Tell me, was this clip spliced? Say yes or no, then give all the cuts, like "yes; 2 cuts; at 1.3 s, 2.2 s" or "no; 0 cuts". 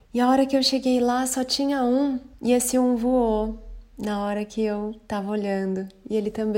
yes; 1 cut; at 2.3 s